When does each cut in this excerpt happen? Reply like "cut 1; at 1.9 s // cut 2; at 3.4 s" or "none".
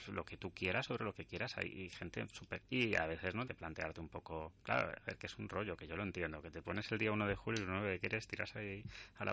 cut 1; at 2.6 s // cut 2; at 3.5 s